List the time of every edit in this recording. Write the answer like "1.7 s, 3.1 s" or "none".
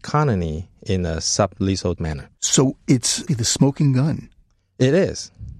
2.0 s, 2.3 s, 3.3 s